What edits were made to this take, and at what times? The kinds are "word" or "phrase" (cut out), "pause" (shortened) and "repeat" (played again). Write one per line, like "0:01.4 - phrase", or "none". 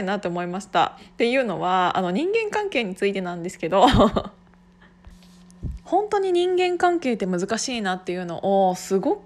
0:05.8 - pause

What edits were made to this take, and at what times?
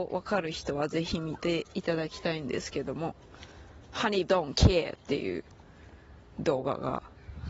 0:04.3 - word

